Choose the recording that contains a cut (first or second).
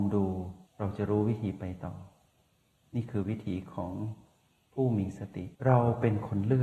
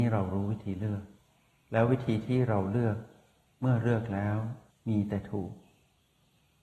first